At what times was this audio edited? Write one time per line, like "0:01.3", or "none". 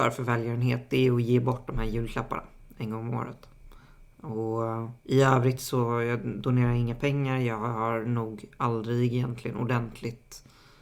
0:05.0